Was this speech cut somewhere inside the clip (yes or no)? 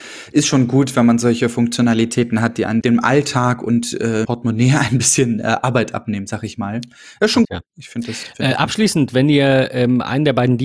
yes